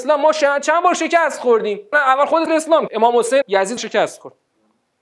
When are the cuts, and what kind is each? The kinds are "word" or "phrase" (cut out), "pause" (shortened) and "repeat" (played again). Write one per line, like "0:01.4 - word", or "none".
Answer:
0:01.9 - word
0:02.5 - word
0:02.9 - word
0:03.4 - word
0:03.8 - word